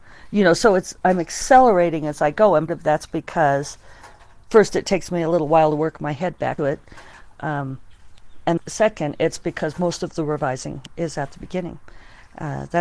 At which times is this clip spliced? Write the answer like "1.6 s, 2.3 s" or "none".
2.7 s, 6.6 s, 8.6 s